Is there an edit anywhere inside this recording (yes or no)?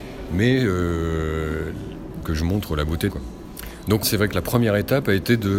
yes